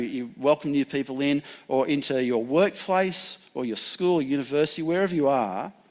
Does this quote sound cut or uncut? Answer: uncut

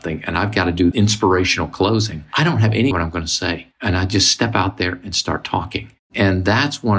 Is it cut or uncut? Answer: cut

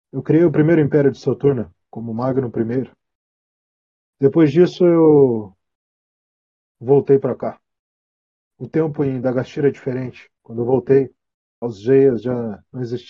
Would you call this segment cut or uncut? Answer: uncut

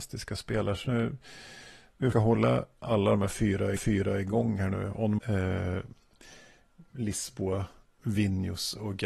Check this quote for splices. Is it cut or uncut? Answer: cut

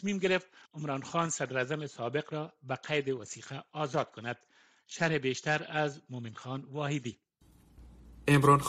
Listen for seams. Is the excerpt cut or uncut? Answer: uncut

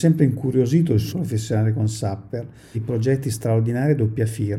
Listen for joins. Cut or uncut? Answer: cut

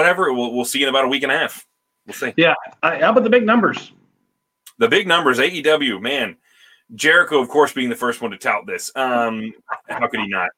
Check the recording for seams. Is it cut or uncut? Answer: uncut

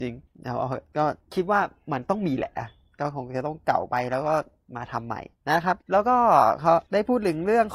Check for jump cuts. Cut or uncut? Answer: uncut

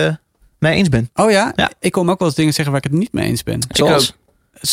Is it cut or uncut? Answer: uncut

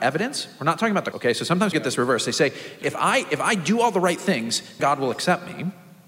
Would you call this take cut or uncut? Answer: cut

